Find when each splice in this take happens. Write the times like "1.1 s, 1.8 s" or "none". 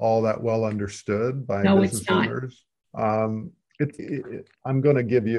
2.8 s, 4.0 s